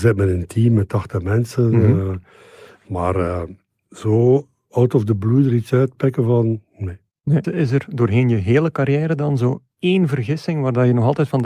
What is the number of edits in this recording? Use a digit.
2